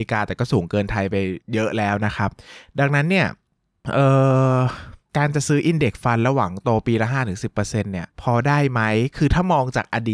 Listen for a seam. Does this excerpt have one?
yes; 3 cuts; at 1.4 s, 5.1 s, 8.1 s

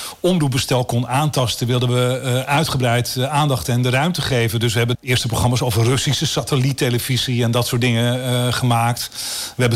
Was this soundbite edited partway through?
yes; 1 cut; at 4.9 s

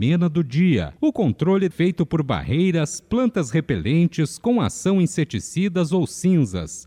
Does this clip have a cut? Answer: yes; 2 cuts; at 1.0 s, 1.7 s

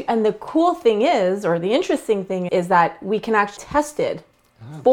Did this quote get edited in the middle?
yes; 2 cuts; at 2.5 s, 3.6 s

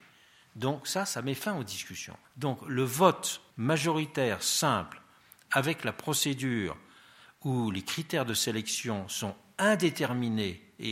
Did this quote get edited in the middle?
yes; 2 cuts; at 2.2 s, 3.5 s

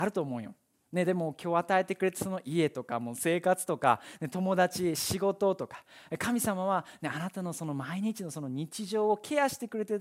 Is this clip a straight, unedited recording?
yes; 0 cuts

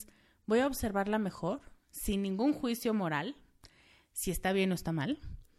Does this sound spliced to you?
no; 0 cuts

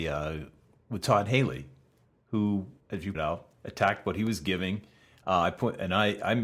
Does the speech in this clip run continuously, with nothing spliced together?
no; 3 cuts; at 2.8 s, 3.1 s, 3.5 s

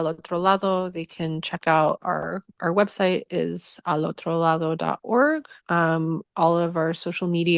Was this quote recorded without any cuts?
no; 1 cut; at 5.6 s

